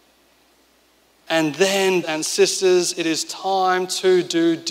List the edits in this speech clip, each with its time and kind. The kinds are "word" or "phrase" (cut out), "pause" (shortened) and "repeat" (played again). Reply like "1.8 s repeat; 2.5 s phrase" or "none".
2.0 s word